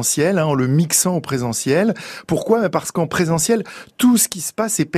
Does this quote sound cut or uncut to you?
uncut